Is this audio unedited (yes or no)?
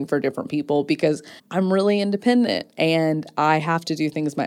no